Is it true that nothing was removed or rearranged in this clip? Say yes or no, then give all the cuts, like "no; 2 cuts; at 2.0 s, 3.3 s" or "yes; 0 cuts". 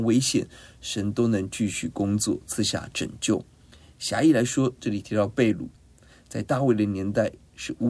yes; 0 cuts